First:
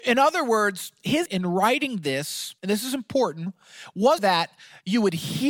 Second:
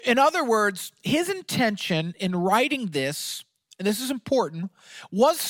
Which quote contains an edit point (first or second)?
first